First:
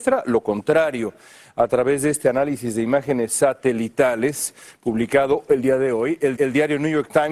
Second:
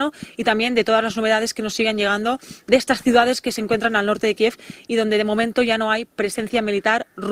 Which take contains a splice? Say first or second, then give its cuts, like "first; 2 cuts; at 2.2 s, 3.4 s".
first; 1 cut; at 6.4 s